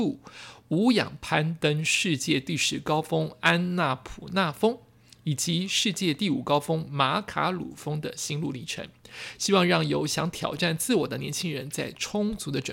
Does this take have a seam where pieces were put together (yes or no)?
no